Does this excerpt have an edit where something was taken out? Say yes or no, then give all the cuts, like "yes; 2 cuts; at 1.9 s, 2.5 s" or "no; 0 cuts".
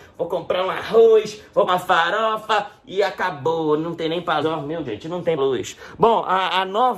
yes; 4 cuts; at 1.7 s, 4.4 s, 4.8 s, 5.4 s